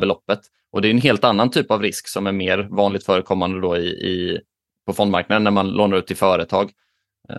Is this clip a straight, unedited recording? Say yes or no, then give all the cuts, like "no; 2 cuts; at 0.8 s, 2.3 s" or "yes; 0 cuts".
yes; 0 cuts